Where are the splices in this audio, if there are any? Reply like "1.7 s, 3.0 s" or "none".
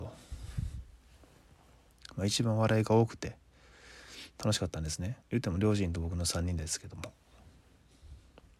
5.2 s